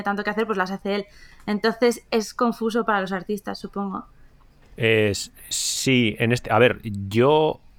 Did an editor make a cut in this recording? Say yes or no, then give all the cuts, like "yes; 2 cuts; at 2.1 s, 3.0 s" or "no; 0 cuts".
no; 0 cuts